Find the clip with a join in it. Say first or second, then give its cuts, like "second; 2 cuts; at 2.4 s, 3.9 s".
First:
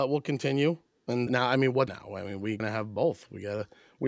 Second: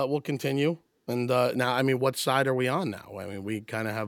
first; 3 cuts; at 1.3 s, 1.9 s, 2.6 s